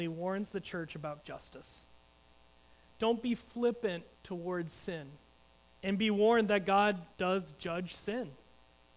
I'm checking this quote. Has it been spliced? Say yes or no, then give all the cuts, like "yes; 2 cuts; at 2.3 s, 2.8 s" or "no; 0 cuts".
yes; 4 cuts; at 1.2 s, 4.1 s, 5.4 s, 7.1 s